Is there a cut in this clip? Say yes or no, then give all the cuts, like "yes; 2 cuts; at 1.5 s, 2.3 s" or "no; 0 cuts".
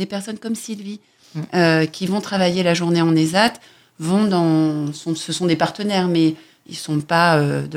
no; 0 cuts